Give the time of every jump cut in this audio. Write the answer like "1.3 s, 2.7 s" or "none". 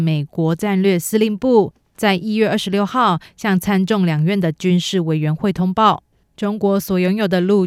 6.2 s